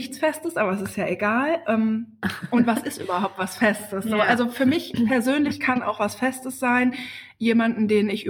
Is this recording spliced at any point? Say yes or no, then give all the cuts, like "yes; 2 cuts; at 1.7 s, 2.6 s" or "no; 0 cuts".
no; 0 cuts